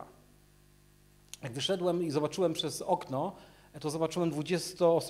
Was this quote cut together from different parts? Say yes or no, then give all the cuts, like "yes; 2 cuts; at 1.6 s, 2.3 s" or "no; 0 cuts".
no; 0 cuts